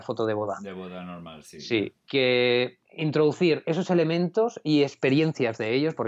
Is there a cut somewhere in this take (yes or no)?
yes